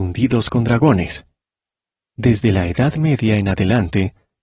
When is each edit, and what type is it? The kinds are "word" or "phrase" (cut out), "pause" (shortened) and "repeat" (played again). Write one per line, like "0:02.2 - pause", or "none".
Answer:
none